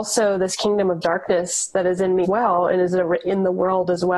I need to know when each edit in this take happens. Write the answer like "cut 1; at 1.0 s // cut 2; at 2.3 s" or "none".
cut 1; at 2.2 s